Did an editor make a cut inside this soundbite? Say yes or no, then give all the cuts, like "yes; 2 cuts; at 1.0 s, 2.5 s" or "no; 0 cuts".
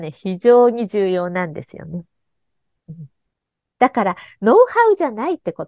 no; 0 cuts